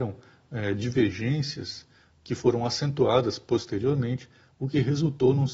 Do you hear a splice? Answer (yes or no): no